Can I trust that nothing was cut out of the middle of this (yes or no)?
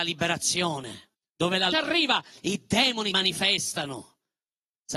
no